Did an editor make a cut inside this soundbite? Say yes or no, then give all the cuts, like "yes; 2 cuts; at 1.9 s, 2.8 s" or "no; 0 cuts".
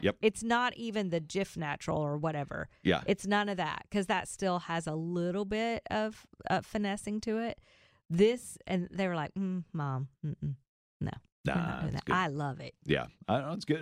no; 0 cuts